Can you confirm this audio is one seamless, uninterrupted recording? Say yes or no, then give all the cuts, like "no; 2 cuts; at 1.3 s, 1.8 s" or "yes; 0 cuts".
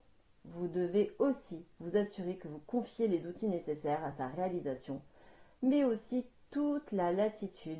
yes; 0 cuts